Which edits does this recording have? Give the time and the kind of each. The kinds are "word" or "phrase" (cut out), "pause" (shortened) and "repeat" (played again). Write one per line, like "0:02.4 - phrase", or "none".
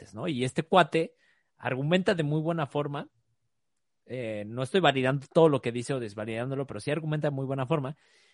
none